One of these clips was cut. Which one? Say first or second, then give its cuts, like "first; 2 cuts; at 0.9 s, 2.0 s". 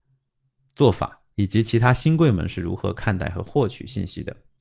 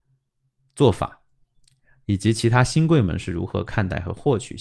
first; 1 cut; at 1.3 s